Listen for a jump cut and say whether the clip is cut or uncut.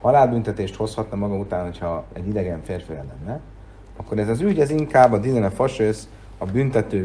uncut